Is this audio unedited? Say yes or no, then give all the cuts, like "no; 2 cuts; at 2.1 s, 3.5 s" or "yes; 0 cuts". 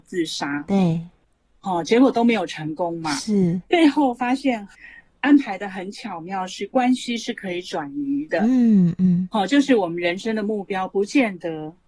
yes; 0 cuts